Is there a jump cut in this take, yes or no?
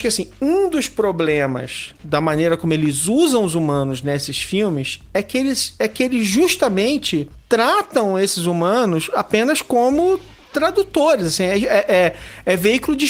yes